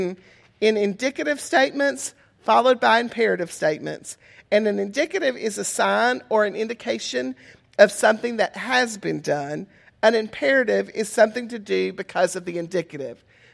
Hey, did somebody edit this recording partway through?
no; 0 cuts

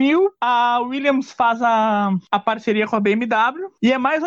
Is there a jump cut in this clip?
no; 0 cuts

